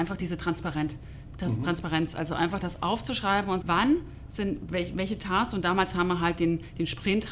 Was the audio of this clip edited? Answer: yes; 1 cut; at 3.6 s

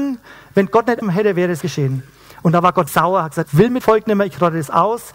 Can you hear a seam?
yes; 5 cuts; at 1.0 s, 1.6 s, 2.9 s, 3.4 s, 3.8 s

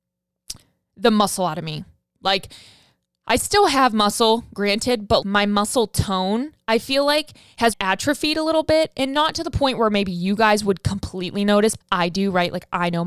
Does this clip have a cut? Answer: yes; 3 cuts; at 5.2 s, 7.7 s, 11.8 s

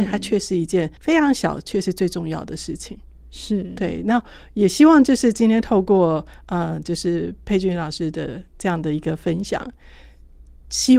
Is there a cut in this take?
yes; 1 cut; at 1.0 s

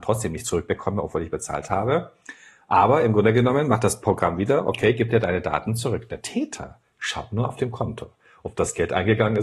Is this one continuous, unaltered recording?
yes; 0 cuts

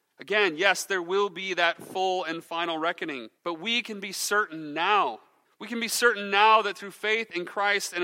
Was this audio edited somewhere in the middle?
yes; 2 cuts; at 3.4 s, 5.4 s

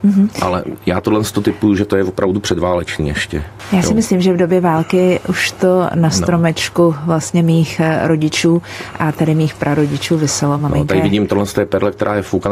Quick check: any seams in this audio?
no; 0 cuts

